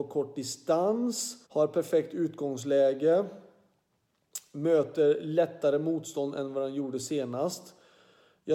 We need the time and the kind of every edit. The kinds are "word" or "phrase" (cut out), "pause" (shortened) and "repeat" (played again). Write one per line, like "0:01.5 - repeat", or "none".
0:01.4 - pause